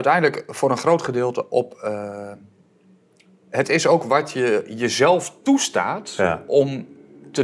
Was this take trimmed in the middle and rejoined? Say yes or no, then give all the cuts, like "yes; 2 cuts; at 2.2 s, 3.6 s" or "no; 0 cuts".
no; 0 cuts